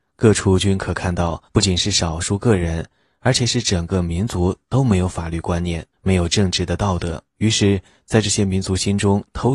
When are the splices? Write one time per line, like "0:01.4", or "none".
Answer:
0:01.5
0:05.9
0:07.3